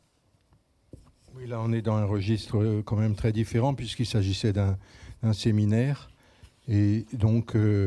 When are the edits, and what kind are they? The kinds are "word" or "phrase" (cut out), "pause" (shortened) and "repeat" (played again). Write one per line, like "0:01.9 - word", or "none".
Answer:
none

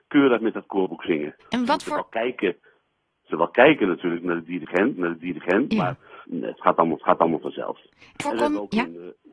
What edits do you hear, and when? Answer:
0:01.4 - pause
0:03.3 - word
0:04.9 - repeat
0:06.2 - word
0:07.0 - repeat
0:08.2 - word

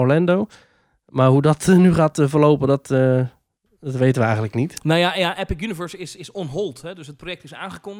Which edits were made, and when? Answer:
none

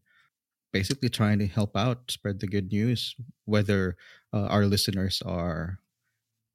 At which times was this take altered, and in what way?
none

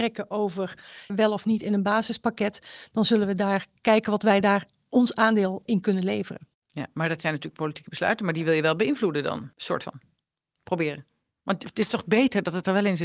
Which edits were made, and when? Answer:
0:01.1 - word
0:05.7 - word
0:09.5 - pause

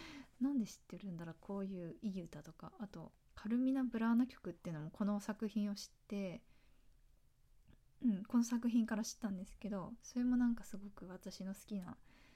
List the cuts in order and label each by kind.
0:03.2 - pause

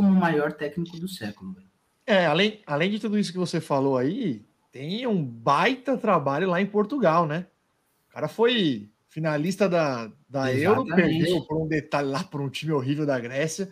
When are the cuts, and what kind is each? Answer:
none

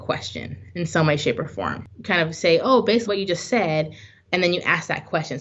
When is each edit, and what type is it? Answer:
0:03.1 - word

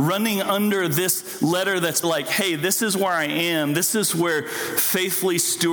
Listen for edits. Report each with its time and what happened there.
0:02.0 - word

